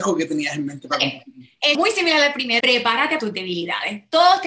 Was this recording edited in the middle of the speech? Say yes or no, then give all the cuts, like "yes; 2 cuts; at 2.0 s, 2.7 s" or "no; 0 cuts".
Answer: yes; 3 cuts; at 1.7 s, 2.6 s, 3.2 s